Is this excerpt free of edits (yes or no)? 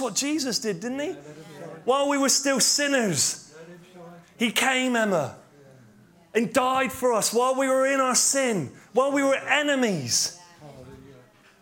yes